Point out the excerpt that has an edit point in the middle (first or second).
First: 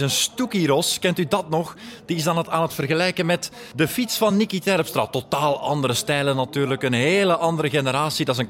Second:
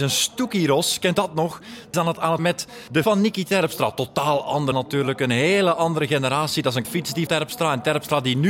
second